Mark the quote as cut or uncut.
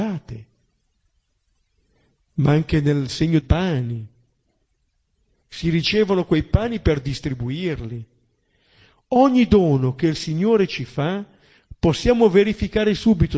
cut